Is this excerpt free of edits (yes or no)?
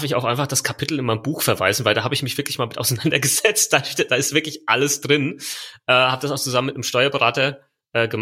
yes